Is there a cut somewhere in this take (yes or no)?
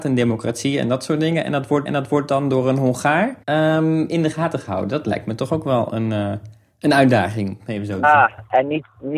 yes